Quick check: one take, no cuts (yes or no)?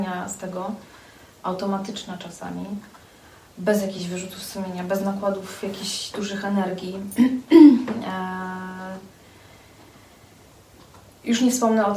yes